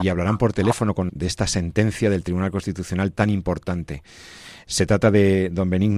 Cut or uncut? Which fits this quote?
cut